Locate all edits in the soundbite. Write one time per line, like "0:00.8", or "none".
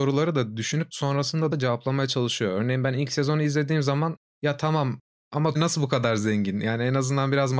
0:01.5
0:05.5

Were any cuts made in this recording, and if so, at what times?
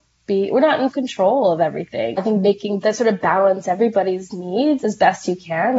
0:00.9
0:02.2
0:02.8

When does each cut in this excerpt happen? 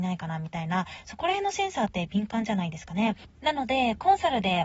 0:03.3

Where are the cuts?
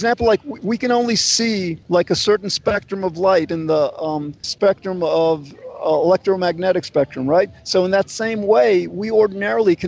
0:01.8
0:04.4

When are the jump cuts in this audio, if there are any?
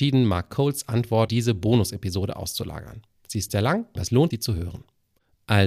0:01.3
0:03.5
0:04.0
0:04.3

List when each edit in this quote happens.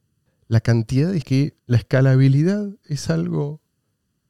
0:01.2
0:01.6

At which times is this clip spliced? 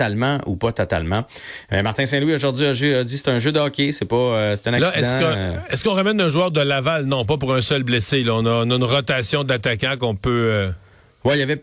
none

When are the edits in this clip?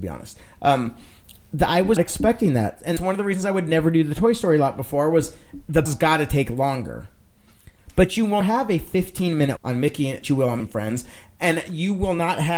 0:02.0
0:03.0
0:05.9
0:08.4
0:09.6
0:10.2
0:10.6

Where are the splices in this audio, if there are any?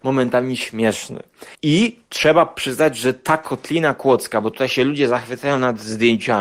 0:01.5

